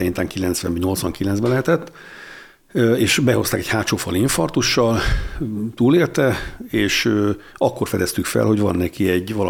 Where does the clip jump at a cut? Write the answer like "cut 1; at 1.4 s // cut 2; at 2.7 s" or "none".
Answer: none